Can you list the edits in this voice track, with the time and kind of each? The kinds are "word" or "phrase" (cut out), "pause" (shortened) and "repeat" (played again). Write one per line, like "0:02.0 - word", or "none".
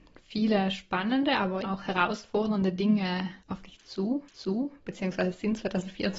0:01.6 - word
0:03.4 - pause
0:04.3 - repeat